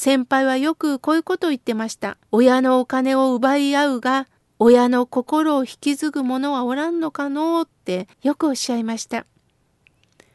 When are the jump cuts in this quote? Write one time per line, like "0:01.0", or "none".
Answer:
0:02.2
0:04.4
0:08.1

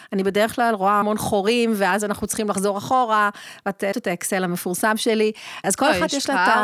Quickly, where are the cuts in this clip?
0:01.0
0:03.9
0:05.6

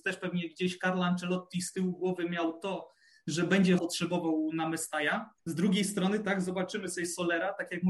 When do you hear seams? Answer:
0:03.8
0:05.4

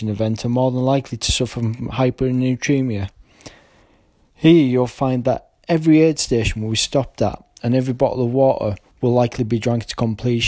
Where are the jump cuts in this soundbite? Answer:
none

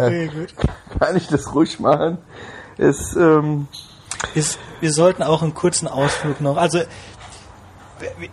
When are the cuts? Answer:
none

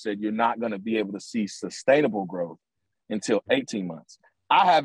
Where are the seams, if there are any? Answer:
none

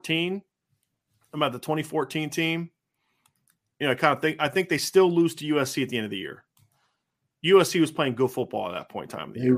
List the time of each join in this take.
none

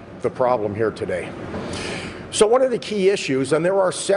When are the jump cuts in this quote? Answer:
none

